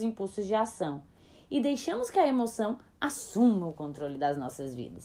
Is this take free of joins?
yes; 0 cuts

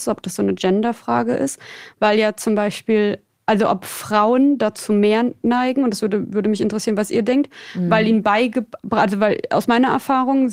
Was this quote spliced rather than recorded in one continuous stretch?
no; 0 cuts

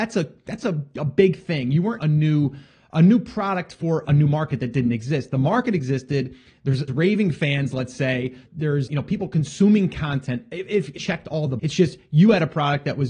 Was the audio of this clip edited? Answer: yes; 7 cuts; at 2.0 s, 4.0 s, 6.9 s, 8.5 s, 8.9 s, 11.0 s, 11.6 s

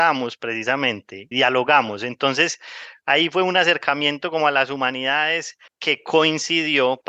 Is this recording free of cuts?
no; 2 cuts; at 1.3 s, 5.7 s

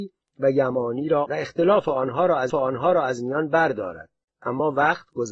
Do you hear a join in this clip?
yes; 2 cuts; at 1.3 s, 2.5 s

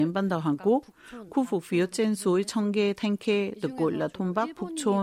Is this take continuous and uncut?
yes; 0 cuts

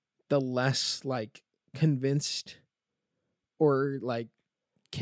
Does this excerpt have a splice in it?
no; 0 cuts

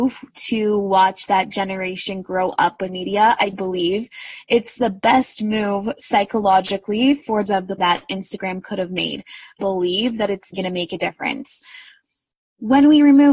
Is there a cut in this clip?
yes; 6 cuts; at 2.9 s, 3.5 s, 7.5 s, 7.8 s, 9.6 s, 10.5 s

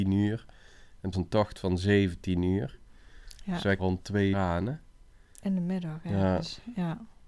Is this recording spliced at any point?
yes; 3 cuts; at 1.1 s, 3.8 s, 4.3 s

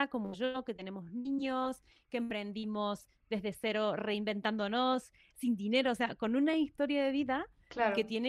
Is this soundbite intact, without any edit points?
yes; 0 cuts

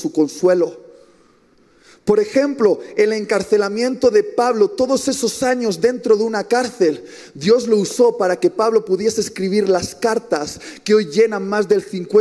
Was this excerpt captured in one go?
yes; 0 cuts

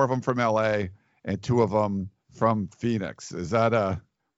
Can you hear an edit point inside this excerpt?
yes; 1 cut; at 2.2 s

